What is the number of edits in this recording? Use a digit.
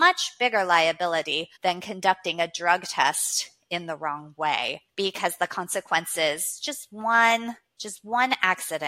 2